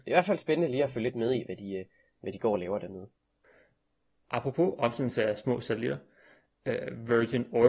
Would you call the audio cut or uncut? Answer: uncut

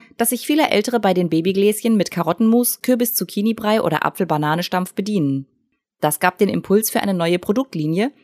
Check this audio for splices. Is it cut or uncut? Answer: uncut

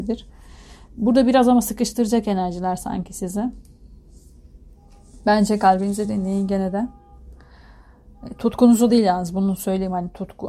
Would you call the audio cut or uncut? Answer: uncut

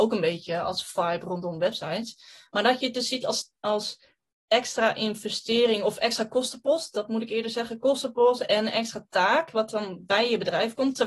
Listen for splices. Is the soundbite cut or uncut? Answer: uncut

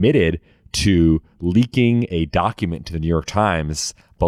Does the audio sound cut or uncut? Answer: uncut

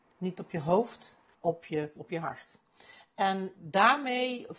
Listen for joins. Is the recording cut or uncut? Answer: cut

